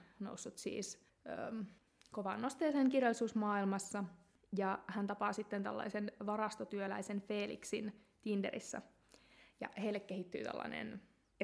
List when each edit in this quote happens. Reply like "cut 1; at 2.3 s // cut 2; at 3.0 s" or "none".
none